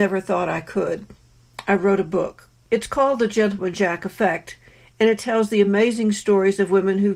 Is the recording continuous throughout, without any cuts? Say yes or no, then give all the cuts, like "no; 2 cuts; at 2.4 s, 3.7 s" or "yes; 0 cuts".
yes; 0 cuts